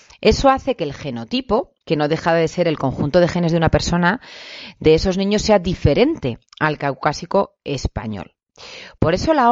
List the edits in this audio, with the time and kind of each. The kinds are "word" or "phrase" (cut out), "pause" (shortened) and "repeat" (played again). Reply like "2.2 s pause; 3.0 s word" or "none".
1.8 s pause; 6.5 s pause

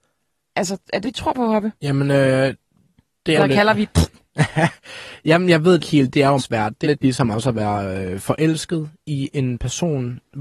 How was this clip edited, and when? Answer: 1.0 s word; 1.8 s pause; 3.4 s phrase; 5.8 s word; 6.4 s word; 6.8 s word

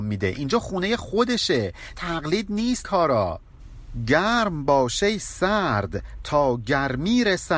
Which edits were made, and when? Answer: 1.9 s word; 2.8 s word

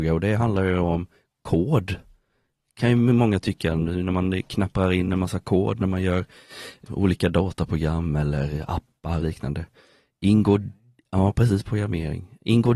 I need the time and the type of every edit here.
6.8 s word; 9.2 s word

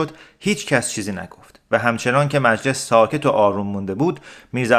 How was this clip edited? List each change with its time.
none

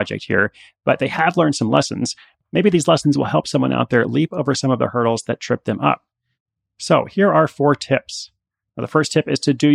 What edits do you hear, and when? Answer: none

